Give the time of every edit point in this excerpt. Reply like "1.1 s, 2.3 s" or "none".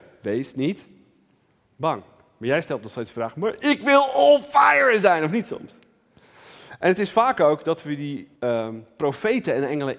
8.4 s